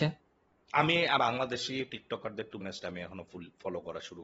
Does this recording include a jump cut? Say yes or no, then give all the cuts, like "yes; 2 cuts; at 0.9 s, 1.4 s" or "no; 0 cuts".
yes; 2 cuts; at 1.2 s, 2.6 s